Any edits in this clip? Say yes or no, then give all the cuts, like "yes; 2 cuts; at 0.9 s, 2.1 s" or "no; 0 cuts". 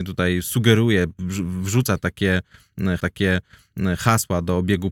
yes; 1 cut; at 3.0 s